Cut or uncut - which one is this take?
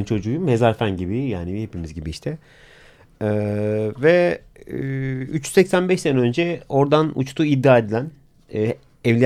uncut